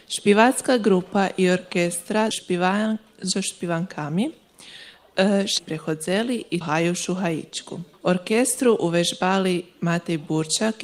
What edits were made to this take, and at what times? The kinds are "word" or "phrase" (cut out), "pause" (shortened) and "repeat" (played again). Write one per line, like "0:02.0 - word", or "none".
0:02.3 - phrase
0:05.6 - word
0:06.6 - word
0:07.9 - pause

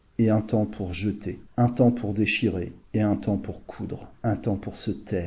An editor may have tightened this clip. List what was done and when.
0:01.5 - pause
0:02.8 - pause
0:04.2 - pause

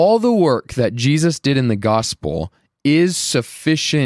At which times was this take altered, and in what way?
none

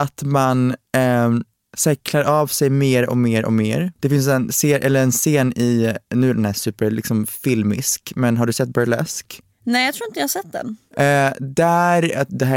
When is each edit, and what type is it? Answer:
0:04.0 - pause

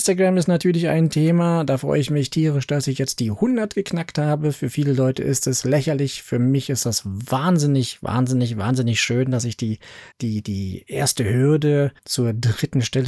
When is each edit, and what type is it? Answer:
0:10.1 - pause
0:12.0 - pause

